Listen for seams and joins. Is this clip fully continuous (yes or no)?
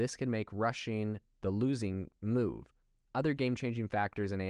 yes